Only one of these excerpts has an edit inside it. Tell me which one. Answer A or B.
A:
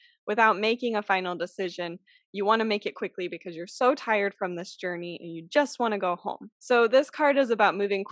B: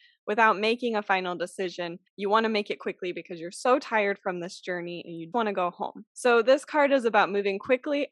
B